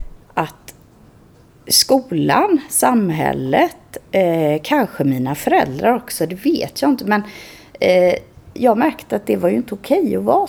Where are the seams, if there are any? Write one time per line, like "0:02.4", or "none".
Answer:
none